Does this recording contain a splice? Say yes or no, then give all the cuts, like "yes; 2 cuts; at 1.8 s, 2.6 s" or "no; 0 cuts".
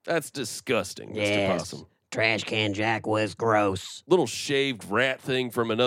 no; 0 cuts